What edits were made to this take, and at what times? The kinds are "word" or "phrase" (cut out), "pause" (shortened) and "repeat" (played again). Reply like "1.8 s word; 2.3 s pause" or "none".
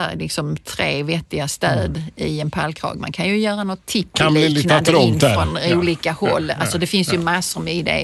none

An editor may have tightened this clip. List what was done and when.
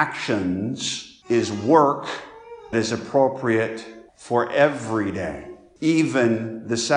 2.7 s word; 4.1 s pause

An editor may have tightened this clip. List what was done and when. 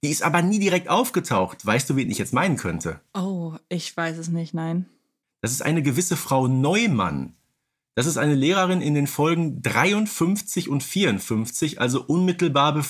none

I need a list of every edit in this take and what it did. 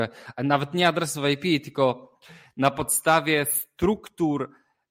none

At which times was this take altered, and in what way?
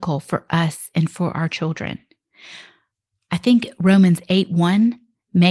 none

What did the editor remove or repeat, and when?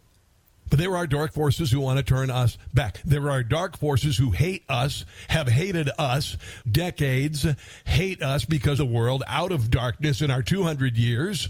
6.6 s word; 8.8 s phrase

